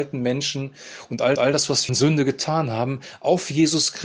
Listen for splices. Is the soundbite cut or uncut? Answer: cut